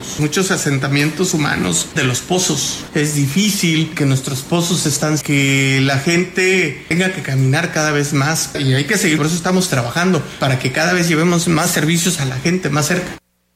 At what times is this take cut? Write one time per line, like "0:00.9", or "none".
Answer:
0:02.0
0:05.2
0:09.2